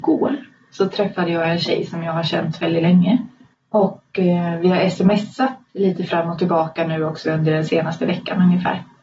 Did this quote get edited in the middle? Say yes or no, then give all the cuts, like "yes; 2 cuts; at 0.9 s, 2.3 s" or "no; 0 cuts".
yes; 2 cuts; at 3.5 s, 5.7 s